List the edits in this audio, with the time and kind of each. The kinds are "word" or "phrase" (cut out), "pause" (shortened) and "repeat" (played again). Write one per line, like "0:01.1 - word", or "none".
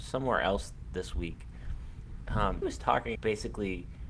0:02.6 - word
0:03.1 - word